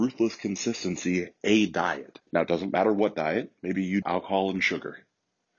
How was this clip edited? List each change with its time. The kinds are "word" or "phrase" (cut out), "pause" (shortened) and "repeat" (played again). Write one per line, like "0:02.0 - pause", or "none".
0:02.3 - pause
0:04.0 - phrase